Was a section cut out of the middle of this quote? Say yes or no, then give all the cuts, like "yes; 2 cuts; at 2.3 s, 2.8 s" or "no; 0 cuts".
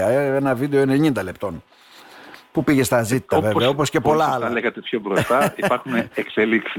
no; 0 cuts